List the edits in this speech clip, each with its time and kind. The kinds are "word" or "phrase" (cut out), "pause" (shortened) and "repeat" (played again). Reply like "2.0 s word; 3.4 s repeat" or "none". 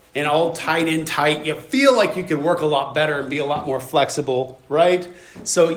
none